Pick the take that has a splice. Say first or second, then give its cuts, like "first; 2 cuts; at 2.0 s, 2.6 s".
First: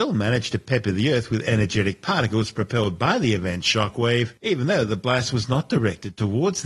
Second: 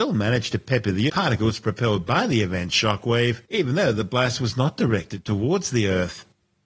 second; 1 cut; at 1.1 s